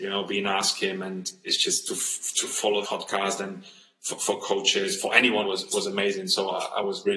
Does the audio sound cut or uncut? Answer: cut